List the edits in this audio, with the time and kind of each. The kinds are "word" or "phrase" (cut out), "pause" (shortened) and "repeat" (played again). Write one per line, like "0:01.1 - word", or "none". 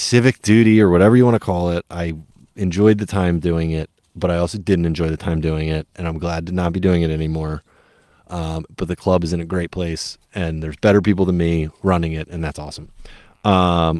none